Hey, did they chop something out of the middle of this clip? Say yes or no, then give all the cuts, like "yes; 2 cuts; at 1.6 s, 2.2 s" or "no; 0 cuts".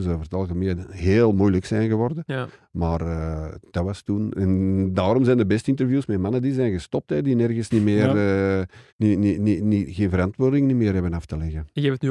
yes; 1 cut; at 8.9 s